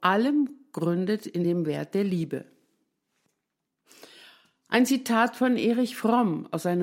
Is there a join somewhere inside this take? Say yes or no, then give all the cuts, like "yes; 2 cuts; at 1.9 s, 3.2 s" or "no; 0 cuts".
no; 0 cuts